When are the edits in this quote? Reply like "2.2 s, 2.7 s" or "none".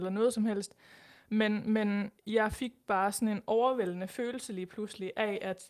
2.2 s